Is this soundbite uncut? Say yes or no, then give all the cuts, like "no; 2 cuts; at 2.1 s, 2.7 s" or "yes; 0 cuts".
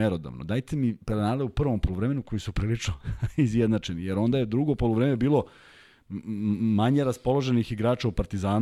yes; 0 cuts